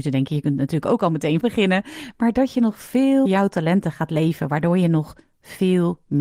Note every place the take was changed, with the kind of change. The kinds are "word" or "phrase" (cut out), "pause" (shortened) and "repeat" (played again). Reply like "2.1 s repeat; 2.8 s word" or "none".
1.4 s word; 3.3 s word